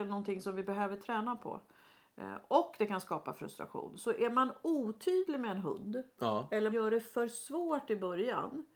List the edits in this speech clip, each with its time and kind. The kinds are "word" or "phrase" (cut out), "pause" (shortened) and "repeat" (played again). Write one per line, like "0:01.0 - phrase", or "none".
0:06.7 - word